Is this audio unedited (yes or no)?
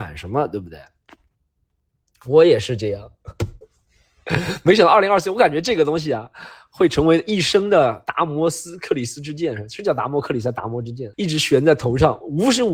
no